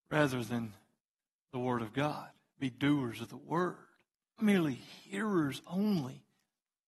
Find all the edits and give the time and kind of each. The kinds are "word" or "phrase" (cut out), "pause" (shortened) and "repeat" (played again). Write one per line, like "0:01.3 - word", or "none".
0:01.0 - pause
0:04.4 - word